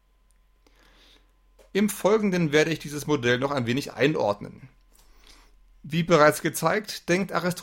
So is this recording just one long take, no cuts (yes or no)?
yes